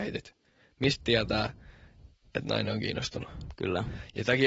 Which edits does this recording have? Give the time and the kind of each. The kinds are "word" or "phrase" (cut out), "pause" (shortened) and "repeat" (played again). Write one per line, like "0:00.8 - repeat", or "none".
none